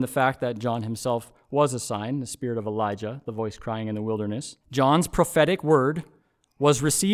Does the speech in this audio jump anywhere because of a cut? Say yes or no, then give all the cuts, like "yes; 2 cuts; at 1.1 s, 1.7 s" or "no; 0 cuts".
yes; 1 cut; at 4.6 s